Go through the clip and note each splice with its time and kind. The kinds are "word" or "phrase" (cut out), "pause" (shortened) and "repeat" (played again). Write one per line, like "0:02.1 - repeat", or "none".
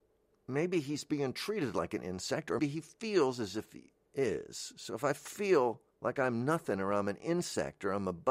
0:02.6 - word
0:05.9 - pause